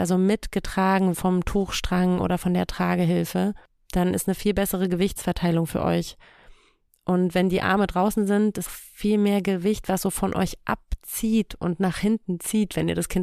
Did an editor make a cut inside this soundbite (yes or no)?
yes